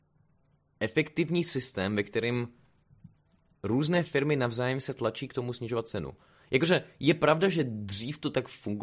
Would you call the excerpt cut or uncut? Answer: uncut